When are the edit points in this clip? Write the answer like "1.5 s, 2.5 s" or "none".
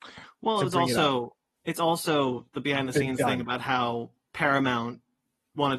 none